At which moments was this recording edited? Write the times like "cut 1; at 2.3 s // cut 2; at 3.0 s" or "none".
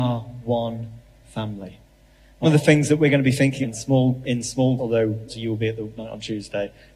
cut 1; at 2.4 s // cut 2; at 3.6 s // cut 3; at 4.2 s // cut 4; at 4.8 s // cut 5; at 5.3 s // cut 6; at 6.0 s